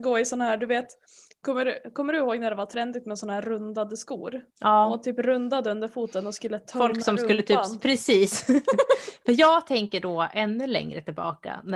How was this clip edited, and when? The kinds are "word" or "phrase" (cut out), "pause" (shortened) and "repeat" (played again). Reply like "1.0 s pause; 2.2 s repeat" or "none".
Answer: 4.5 s pause

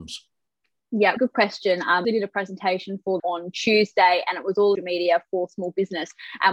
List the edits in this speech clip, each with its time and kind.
1.2 s word; 2.0 s phrase; 3.2 s phrase; 4.8 s phrase

